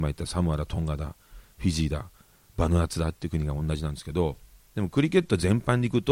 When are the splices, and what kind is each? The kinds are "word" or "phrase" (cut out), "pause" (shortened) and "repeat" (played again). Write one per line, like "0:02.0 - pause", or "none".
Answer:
none